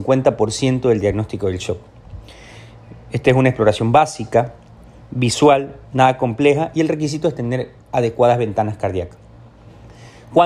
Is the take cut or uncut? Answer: uncut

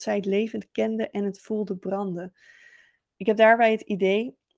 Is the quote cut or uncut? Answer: uncut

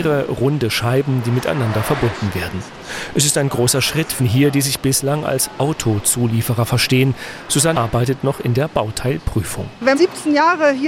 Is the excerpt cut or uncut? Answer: cut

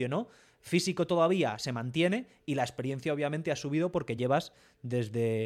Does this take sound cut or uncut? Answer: uncut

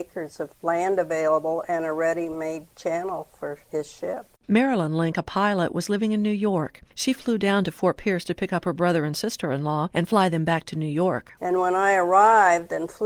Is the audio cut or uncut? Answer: cut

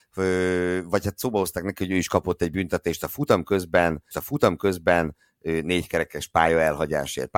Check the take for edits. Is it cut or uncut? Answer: cut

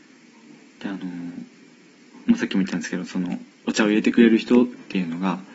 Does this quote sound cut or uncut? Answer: uncut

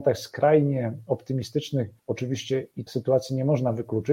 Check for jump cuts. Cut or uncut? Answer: cut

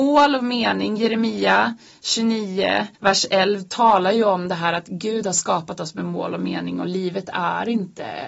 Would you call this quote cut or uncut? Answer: cut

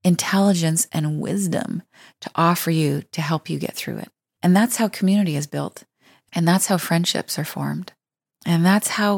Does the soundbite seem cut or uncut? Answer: uncut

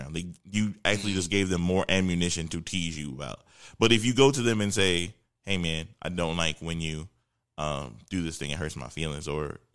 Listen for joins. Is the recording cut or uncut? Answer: uncut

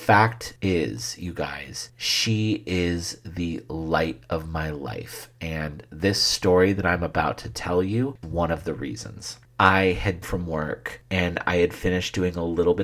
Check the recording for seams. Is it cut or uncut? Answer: cut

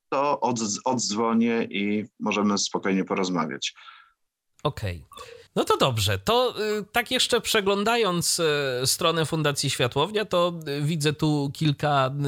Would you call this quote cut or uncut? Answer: cut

